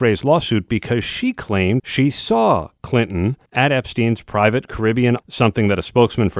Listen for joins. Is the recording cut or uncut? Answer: cut